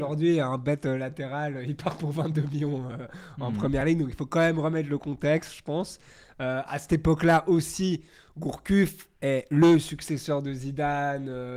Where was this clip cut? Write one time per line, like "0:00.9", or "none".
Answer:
none